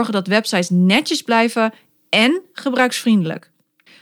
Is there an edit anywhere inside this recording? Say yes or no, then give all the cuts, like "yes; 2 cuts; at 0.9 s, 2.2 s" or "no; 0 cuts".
no; 0 cuts